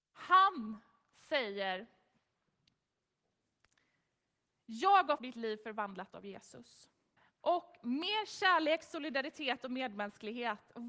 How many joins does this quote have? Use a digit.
2